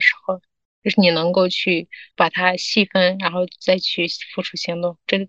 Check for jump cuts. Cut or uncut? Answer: cut